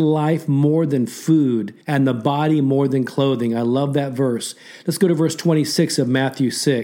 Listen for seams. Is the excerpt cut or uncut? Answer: cut